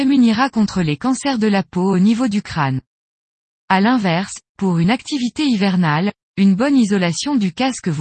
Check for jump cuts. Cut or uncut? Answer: uncut